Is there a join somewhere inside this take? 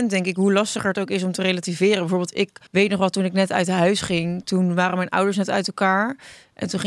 yes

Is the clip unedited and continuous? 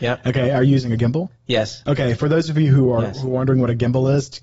no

